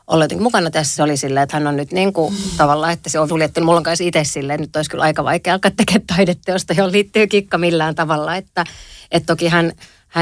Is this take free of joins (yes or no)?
no